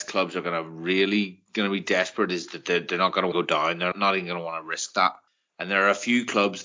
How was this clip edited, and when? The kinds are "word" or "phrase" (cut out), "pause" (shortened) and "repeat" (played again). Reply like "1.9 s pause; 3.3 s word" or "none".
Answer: 1.5 s pause; 3.3 s phrase; 3.9 s word; 5.3 s pause